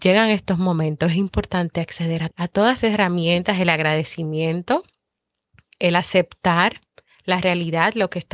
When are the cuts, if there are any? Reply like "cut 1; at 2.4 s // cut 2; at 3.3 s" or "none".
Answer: cut 1; at 2.3 s // cut 2; at 2.8 s